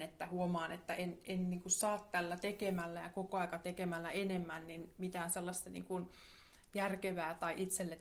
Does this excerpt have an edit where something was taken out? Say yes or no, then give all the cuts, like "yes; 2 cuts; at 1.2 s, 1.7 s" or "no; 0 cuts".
no; 0 cuts